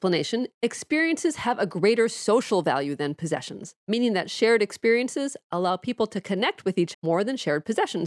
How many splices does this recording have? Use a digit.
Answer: 2